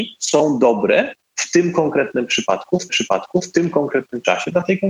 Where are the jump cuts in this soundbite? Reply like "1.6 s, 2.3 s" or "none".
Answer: 2.9 s